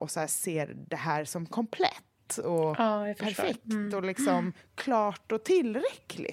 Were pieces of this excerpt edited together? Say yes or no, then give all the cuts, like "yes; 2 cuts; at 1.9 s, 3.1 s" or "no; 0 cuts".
no; 0 cuts